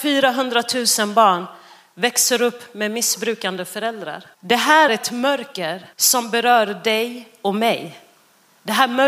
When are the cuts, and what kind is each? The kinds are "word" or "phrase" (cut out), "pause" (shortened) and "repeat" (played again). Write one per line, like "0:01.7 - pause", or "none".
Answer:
0:04.3 - pause
0:04.9 - word
0:05.9 - pause